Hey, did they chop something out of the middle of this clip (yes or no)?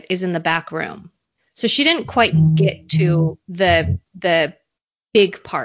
yes